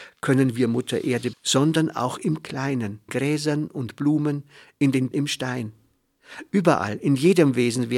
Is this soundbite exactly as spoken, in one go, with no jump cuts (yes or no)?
no